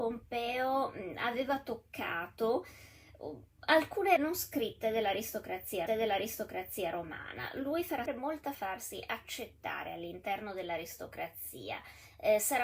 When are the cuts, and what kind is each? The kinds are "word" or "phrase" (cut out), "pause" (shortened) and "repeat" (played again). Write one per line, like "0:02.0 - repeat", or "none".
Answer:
0:04.2 - word
0:05.9 - repeat
0:08.1 - word
0:08.5 - phrase